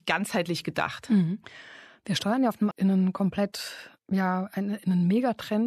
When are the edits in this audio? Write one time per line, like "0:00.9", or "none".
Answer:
0:02.7
0:04.0